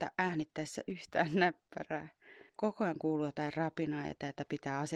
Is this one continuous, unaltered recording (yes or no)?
no